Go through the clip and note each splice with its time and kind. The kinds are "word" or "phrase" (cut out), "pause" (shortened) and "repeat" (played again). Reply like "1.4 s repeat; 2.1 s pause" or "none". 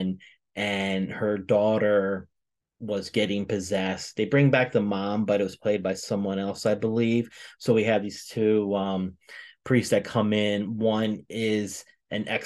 none